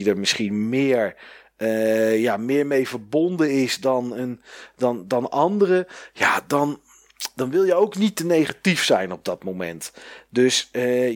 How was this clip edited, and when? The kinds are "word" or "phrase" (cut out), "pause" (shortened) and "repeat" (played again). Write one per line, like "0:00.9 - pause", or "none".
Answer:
none